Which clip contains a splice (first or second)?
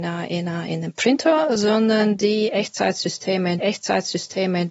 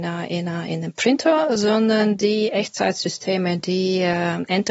first